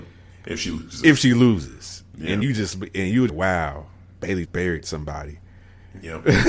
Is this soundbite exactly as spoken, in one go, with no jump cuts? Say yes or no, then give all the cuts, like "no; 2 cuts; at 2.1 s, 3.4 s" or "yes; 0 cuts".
no; 3 cuts; at 2.4 s, 3.3 s, 4.5 s